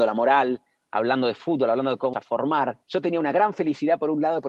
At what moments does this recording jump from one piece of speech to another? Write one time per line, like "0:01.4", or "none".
0:02.1
0:02.8